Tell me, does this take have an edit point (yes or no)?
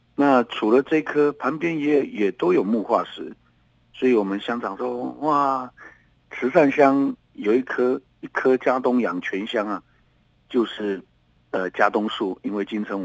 yes